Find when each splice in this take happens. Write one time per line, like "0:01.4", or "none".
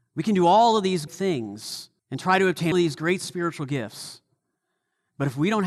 0:01.1
0:02.0
0:02.7